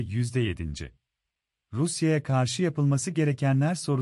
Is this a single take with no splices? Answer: no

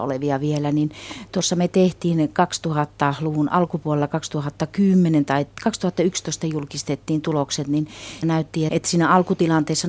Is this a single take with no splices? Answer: no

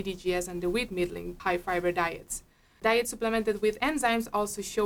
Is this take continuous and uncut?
yes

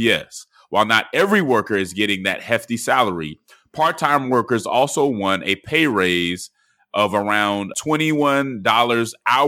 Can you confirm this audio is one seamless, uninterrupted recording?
yes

